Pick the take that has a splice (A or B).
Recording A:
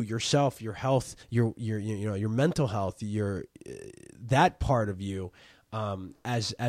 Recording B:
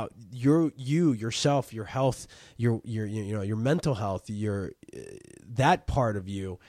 A